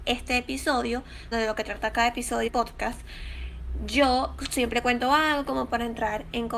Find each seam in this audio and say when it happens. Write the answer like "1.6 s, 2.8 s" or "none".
1.3 s, 2.5 s